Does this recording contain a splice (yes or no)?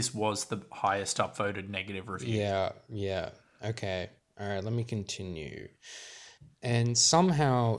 no